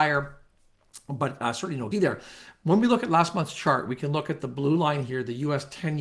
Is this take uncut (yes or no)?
no